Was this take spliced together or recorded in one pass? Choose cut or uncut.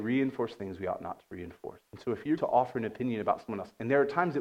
cut